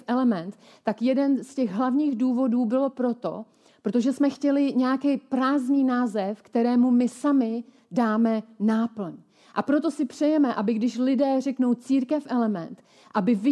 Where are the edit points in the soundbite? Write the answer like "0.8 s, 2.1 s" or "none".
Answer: none